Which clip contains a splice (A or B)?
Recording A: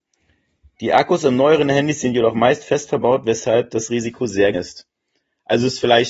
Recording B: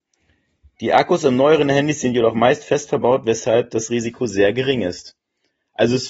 A